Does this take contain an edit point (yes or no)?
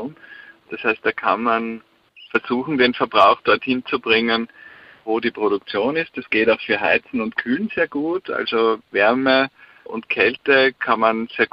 no